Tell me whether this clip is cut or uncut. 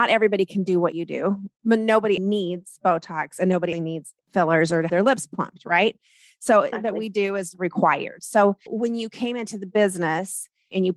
cut